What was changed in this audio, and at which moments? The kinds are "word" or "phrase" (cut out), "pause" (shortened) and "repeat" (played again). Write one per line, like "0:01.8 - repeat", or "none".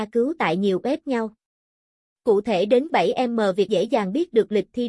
0:01.0 - word
0:02.9 - word
0:03.7 - word